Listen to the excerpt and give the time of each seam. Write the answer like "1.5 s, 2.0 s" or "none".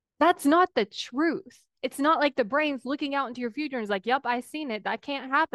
1.7 s